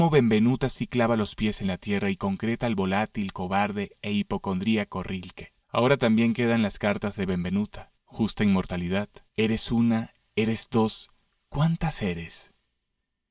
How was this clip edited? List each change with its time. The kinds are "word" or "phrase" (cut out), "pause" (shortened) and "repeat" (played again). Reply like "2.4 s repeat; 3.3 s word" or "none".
5.6 s pause; 7.9 s pause; 9.3 s pause